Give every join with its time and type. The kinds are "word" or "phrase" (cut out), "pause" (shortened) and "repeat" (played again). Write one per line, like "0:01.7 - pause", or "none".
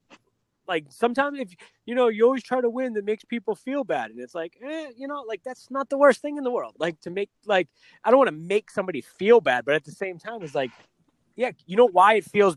none